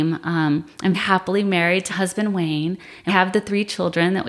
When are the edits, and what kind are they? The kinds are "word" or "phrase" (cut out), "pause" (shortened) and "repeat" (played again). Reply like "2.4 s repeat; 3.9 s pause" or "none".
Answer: 0.9 s word; 1.9 s word; 3.1 s word